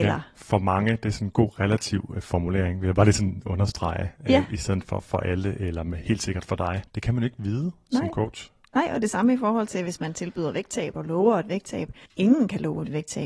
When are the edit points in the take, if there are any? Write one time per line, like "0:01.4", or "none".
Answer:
0:06.9
0:12.1